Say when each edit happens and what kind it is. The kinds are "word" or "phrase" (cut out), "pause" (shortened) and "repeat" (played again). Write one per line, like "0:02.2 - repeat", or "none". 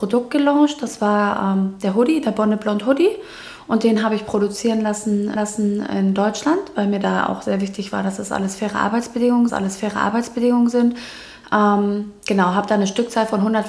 0:05.4 - repeat
0:09.5 - repeat